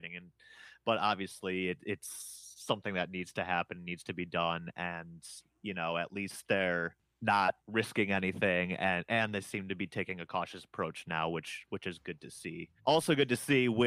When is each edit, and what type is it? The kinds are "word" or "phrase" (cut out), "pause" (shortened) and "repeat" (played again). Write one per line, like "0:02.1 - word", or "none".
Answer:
0:07.6 - pause
0:12.8 - pause